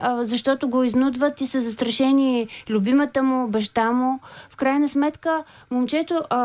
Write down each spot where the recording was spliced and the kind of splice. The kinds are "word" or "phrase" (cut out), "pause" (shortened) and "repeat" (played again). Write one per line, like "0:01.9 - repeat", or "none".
none